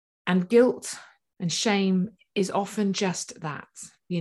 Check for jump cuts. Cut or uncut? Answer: uncut